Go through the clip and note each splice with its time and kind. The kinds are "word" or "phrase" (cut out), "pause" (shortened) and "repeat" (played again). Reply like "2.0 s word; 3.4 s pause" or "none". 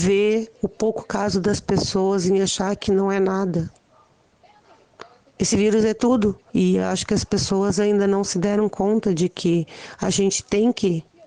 none